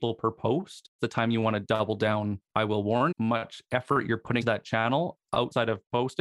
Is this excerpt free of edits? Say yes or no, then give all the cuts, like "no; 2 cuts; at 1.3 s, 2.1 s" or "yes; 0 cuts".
no; 4 cuts; at 1.0 s, 2.5 s, 3.1 s, 4.4 s